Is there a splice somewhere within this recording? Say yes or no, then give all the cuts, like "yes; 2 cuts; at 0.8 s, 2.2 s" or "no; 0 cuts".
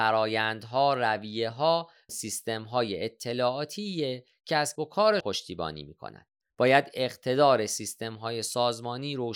yes; 4 cuts; at 2.1 s, 4.8 s, 5.2 s, 6.4 s